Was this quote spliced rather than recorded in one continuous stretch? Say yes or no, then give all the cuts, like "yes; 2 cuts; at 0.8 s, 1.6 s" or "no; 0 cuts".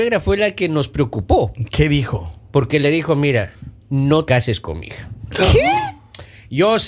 yes; 1 cut; at 4.3 s